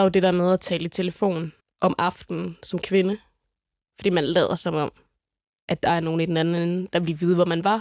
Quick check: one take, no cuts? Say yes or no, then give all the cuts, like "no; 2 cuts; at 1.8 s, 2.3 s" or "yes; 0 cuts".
no; 1 cut; at 1.6 s